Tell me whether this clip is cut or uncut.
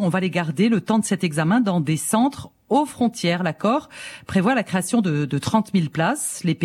uncut